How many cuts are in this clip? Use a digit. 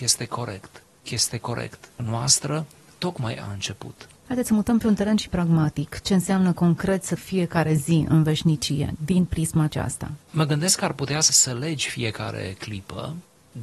7